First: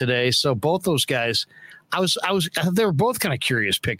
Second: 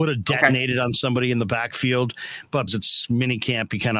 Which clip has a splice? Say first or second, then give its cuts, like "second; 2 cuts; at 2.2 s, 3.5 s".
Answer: second; 1 cut; at 2.7 s